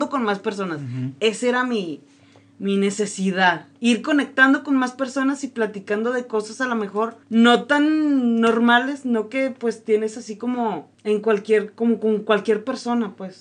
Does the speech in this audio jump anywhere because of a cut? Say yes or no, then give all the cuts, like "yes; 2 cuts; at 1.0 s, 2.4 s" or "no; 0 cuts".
yes; 2 cuts; at 7.2 s, 10.9 s